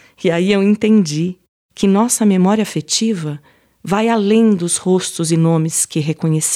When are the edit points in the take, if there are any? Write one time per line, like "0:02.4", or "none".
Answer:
none